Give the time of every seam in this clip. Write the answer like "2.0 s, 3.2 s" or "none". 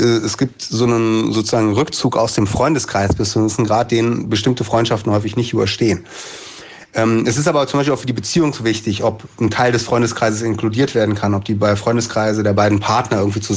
none